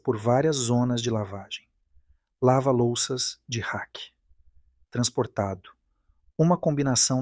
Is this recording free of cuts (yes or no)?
yes